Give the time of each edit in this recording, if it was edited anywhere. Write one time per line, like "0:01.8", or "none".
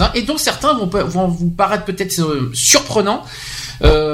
none